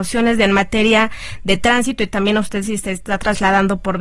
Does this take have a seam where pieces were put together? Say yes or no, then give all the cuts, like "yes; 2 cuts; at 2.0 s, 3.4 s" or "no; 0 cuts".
no; 0 cuts